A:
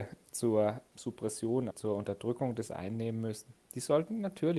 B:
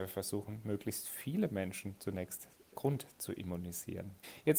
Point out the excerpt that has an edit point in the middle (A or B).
A